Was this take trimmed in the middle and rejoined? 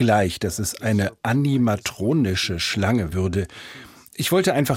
yes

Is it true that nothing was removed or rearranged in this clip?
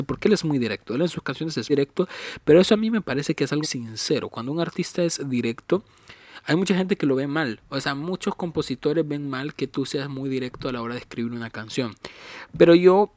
no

